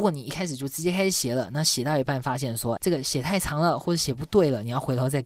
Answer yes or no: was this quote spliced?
yes